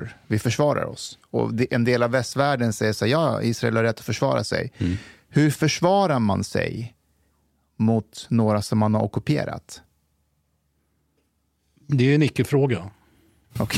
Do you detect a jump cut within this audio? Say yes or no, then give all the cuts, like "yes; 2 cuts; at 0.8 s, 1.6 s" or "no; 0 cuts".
no; 0 cuts